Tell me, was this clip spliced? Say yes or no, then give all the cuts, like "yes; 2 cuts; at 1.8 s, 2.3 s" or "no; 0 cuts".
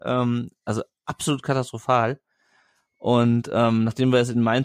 no; 0 cuts